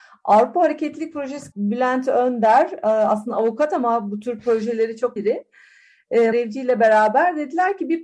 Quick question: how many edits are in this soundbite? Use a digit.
3